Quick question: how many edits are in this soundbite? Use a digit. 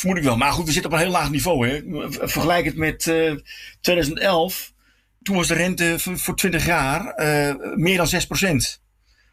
0